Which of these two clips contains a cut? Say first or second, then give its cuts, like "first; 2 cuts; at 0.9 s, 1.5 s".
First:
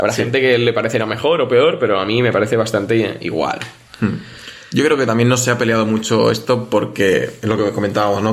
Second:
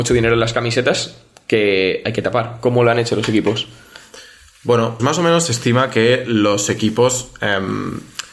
second; 1 cut; at 5.0 s